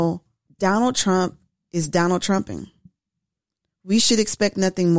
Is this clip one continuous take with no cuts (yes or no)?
yes